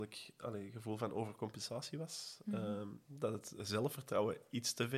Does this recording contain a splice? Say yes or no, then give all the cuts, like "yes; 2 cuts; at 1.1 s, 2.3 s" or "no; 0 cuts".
no; 0 cuts